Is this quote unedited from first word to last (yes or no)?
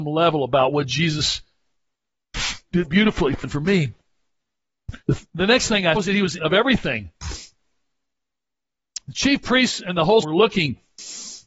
no